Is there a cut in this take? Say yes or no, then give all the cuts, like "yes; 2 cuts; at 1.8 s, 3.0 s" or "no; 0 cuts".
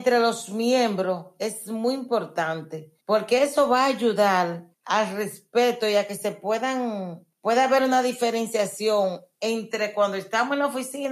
yes; 3 cuts; at 3.0 s, 4.7 s, 7.3 s